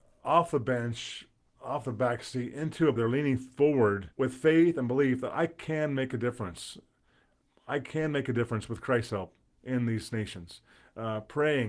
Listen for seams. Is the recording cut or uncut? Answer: cut